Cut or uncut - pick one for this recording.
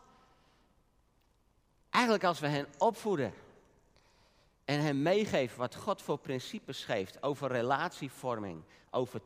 uncut